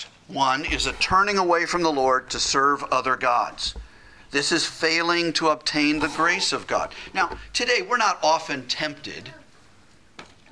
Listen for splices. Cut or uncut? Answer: uncut